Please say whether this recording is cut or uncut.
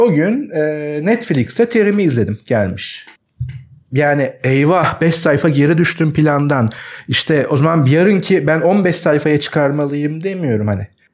uncut